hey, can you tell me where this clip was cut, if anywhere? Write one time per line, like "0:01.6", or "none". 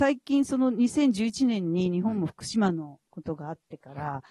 0:03.1